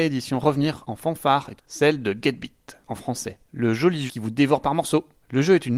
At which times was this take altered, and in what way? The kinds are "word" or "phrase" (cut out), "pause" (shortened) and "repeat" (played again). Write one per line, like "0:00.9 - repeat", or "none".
0:01.6 - word
0:02.8 - word
0:04.1 - word